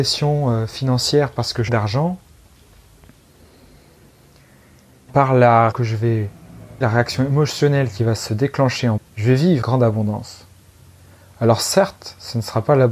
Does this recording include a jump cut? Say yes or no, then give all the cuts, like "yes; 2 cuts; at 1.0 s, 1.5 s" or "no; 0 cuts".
yes; 6 cuts; at 1.7 s, 5.1 s, 5.7 s, 6.8 s, 9.0 s, 9.6 s